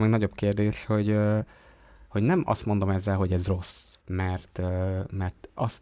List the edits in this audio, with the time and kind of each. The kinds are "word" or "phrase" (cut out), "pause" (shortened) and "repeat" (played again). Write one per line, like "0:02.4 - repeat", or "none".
0:04.0 - pause

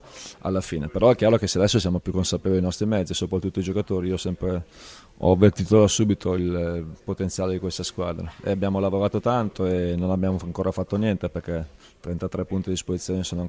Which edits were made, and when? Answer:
none

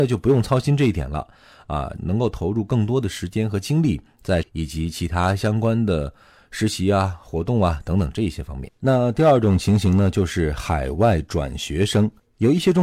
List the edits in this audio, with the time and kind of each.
0:04.4 - word

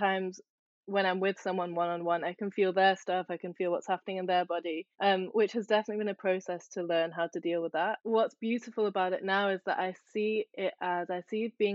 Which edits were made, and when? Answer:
0:04.9 - pause

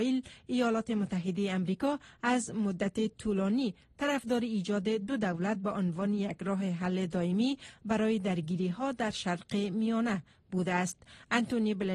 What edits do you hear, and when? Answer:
none

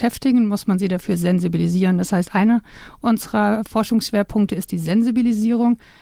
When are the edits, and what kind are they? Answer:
none

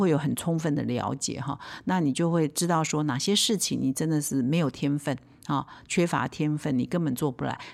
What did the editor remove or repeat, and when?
none

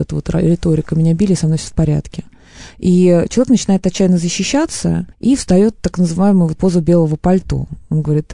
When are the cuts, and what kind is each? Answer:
0:05.1 - pause
0:06.5 - word

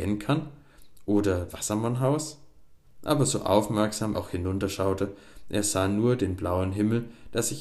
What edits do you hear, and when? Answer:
0:01.5 - word
0:02.8 - pause
0:04.1 - word

